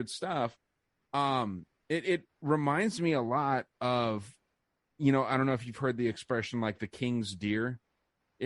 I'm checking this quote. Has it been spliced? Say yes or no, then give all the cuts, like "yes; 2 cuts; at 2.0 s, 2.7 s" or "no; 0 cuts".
no; 0 cuts